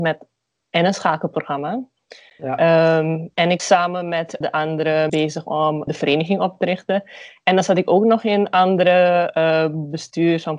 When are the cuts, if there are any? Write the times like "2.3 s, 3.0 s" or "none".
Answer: 3.6 s, 4.4 s, 5.1 s, 5.9 s